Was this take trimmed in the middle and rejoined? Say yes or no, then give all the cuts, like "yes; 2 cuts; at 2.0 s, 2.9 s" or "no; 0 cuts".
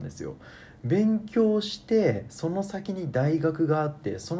no; 0 cuts